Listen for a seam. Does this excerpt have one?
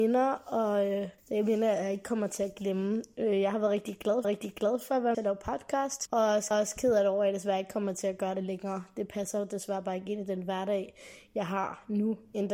yes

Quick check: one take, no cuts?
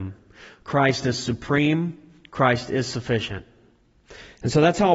yes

